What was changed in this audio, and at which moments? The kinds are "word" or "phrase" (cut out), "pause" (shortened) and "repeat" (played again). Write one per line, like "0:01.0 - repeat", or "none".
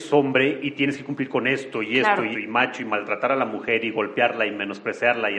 0:02.3 - word